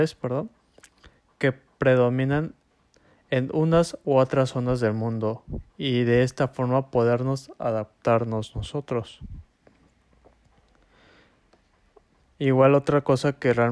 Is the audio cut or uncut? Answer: cut